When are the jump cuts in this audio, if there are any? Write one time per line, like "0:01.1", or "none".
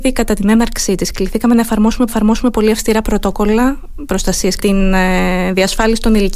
0:02.1
0:04.6